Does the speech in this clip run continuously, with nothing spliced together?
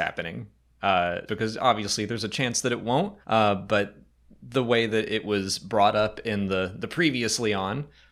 no; 2 cuts; at 1.3 s, 3.2 s

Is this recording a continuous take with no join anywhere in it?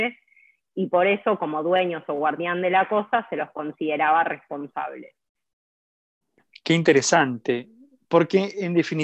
yes; 0 cuts

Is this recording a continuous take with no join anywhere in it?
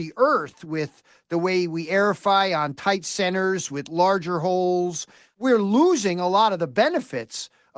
yes; 0 cuts

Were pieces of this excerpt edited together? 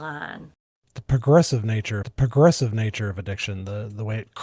yes; 1 cut; at 2.0 s

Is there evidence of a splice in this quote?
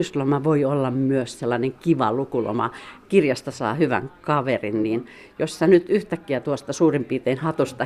no; 0 cuts

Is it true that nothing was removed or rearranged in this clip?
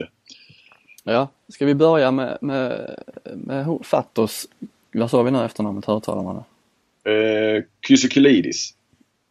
no; 2 cuts; at 1.4 s, 4.8 s

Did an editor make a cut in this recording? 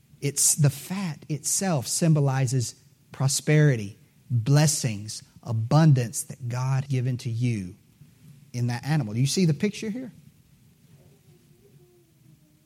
yes; 1 cut; at 6.9 s

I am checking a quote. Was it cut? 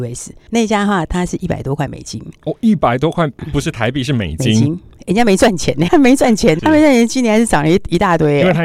yes; 2 cuts; at 5.9 s, 6.6 s

